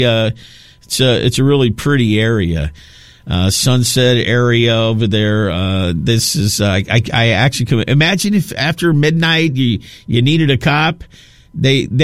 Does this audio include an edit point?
no; 0 cuts

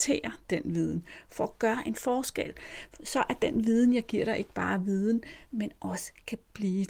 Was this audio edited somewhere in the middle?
no; 0 cuts

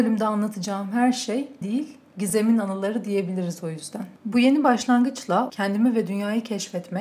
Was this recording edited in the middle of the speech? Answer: yes; 3 cuts; at 1.6 s, 4.2 s, 5.5 s

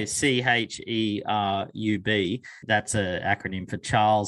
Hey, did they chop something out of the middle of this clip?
no; 0 cuts

